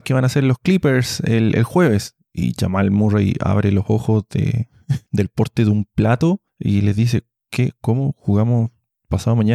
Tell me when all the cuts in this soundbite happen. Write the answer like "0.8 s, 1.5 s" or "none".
5.1 s, 6.5 s